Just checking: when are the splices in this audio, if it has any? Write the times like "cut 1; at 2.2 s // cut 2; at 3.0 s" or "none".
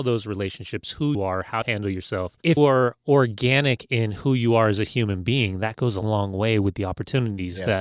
cut 1; at 1.1 s // cut 2; at 1.6 s // cut 3; at 2.6 s // cut 4; at 6.0 s